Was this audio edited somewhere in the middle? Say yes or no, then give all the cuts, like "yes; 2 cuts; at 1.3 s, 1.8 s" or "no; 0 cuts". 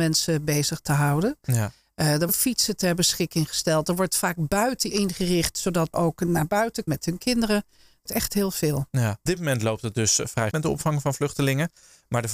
yes; 7 cuts; at 2.3 s, 4.9 s, 5.9 s, 6.9 s, 8.1 s, 9.3 s, 10.5 s